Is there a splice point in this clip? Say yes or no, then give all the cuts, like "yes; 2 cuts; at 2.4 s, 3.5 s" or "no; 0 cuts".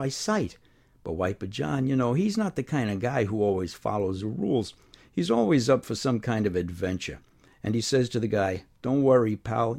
no; 0 cuts